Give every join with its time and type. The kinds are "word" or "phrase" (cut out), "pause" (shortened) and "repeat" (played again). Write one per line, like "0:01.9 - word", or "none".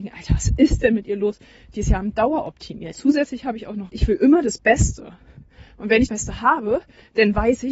0:02.9 - word
0:03.9 - phrase
0:06.1 - word